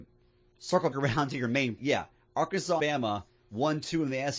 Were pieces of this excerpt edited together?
yes; 3 cuts; at 0.9 s, 1.8 s, 2.8 s

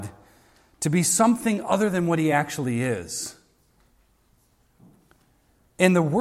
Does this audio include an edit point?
no; 0 cuts

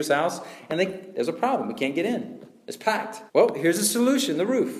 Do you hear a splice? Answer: yes; 1 cut; at 3.3 s

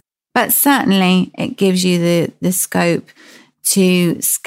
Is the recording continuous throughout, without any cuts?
yes; 0 cuts

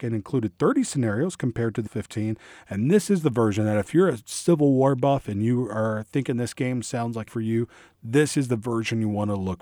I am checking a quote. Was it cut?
yes; 2 cuts; at 1.9 s, 7.3 s

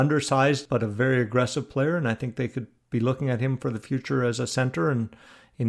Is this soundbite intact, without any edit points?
yes; 0 cuts

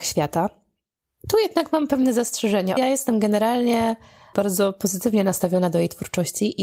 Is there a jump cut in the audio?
yes; 2 cuts; at 2.8 s, 4.3 s

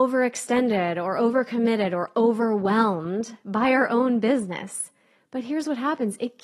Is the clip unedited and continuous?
yes; 0 cuts

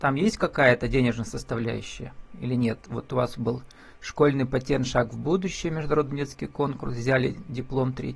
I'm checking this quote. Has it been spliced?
no; 0 cuts

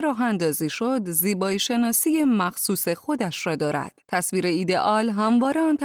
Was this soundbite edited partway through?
yes; 1 cut; at 4.0 s

